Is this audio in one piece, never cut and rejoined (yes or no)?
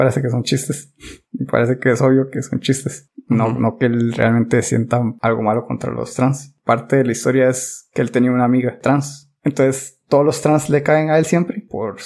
yes